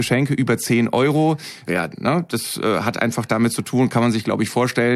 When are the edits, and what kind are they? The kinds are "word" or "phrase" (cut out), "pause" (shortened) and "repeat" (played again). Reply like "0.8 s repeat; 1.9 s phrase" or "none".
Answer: 1.7 s phrase